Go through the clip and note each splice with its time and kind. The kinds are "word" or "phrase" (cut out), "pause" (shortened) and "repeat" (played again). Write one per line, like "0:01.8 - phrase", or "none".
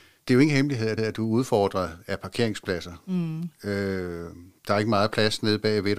0:01.0 - repeat
0:04.6 - pause